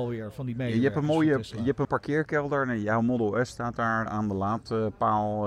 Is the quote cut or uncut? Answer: cut